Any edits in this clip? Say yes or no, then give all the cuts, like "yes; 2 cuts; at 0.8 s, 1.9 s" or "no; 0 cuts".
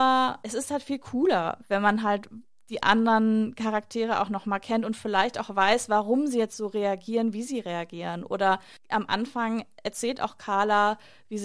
no; 0 cuts